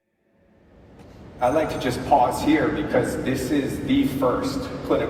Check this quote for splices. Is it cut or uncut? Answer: uncut